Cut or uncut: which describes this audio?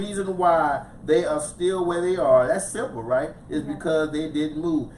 uncut